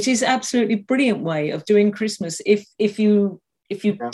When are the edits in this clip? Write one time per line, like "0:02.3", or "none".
0:02.7

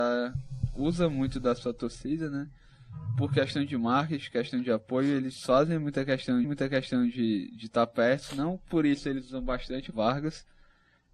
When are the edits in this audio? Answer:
0:06.4
0:09.9

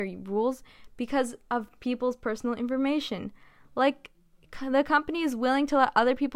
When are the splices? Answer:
none

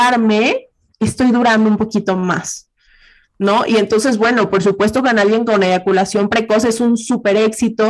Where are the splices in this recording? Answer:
none

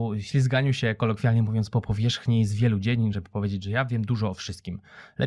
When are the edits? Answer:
none

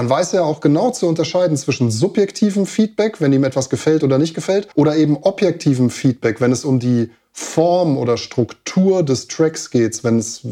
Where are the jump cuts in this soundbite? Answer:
0:04.7

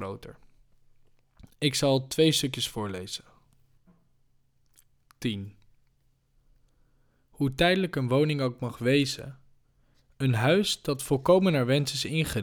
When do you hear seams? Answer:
none

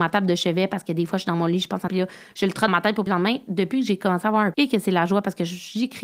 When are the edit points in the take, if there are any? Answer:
0:01.9
0:02.7
0:03.1
0:04.5

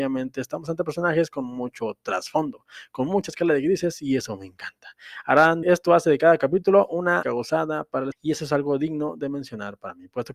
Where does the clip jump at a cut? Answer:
0:05.6
0:07.2
0:08.1

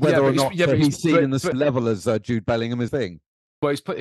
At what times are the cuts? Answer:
0:01.5
0:02.9

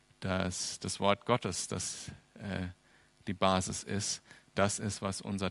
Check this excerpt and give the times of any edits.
none

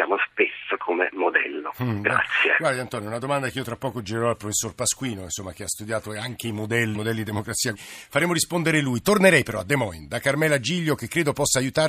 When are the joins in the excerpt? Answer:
0:06.9
0:07.7

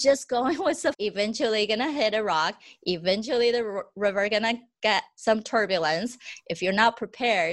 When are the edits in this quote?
0:00.9

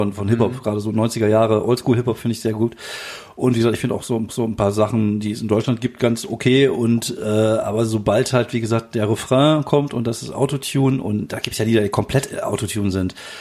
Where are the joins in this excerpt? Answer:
0:04.3

